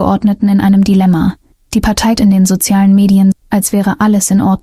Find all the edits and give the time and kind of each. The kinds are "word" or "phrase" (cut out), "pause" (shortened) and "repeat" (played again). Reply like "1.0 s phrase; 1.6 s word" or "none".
1.5 s pause; 2.2 s word; 3.3 s word